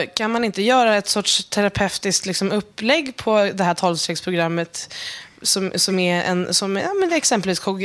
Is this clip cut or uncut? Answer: uncut